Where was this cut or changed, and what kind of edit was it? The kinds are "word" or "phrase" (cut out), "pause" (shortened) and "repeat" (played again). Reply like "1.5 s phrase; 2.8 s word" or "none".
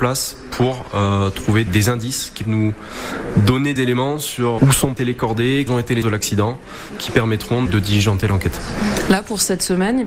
1.7 s word; 2.4 s word; 3.8 s word; 4.6 s word; 5.0 s word; 5.7 s word; 6.0 s word; 7.7 s word